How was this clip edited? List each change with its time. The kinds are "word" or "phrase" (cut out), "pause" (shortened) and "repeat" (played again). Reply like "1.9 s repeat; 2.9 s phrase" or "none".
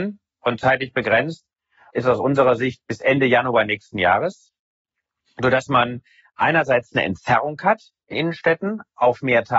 1.9 s word; 8.1 s word